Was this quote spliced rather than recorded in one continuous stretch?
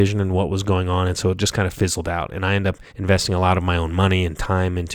yes; 1 cut; at 2.9 s

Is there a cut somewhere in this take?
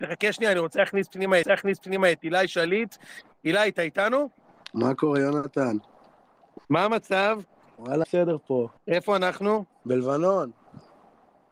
yes; 4 cuts; at 1.4 s, 6.6 s, 8.0 s, 8.8 s

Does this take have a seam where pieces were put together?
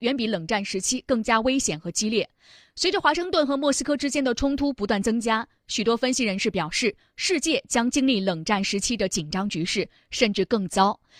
no; 0 cuts

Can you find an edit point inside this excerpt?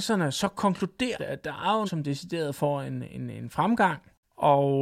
yes; 2 cuts; at 1.2 s, 1.9 s

